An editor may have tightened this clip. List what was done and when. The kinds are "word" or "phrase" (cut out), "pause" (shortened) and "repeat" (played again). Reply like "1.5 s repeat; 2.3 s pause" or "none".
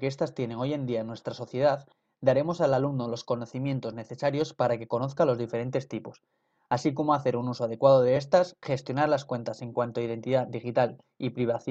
none